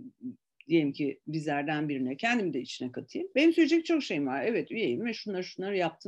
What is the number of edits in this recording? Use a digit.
0